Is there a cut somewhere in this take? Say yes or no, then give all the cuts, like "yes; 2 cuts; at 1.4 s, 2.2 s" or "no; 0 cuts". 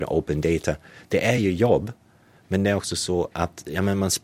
no; 0 cuts